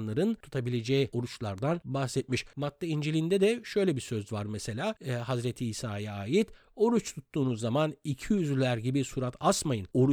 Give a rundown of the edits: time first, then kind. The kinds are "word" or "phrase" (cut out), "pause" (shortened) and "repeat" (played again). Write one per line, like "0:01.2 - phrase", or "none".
none